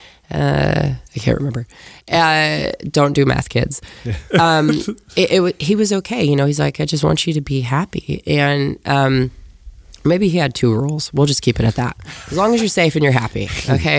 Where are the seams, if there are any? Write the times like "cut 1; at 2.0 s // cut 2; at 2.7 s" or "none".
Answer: cut 1; at 1.1 s